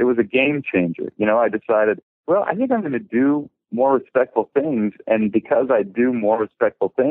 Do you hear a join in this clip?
no; 0 cuts

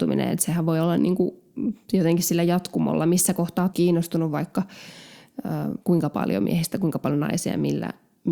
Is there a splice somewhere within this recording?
yes; 2 cuts; at 3.7 s, 5.8 s

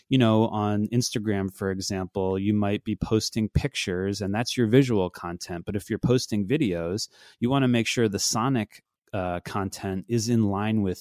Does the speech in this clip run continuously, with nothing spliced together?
yes; 0 cuts

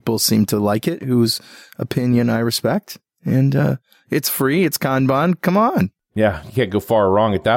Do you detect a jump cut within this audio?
no; 0 cuts

